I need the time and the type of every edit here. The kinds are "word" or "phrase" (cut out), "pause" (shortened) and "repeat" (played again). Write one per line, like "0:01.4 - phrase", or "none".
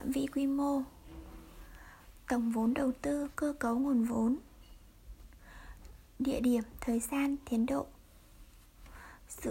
none